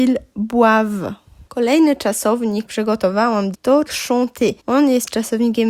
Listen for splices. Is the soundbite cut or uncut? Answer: cut